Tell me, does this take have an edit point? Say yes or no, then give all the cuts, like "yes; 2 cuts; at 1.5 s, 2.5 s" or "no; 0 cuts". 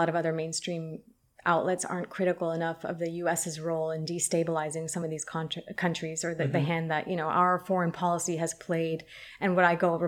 no; 0 cuts